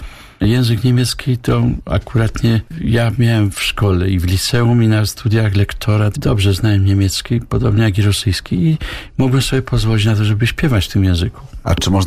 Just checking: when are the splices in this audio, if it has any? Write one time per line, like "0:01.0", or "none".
0:03.5
0:06.1